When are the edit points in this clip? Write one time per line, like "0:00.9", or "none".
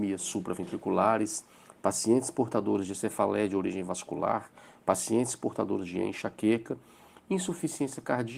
none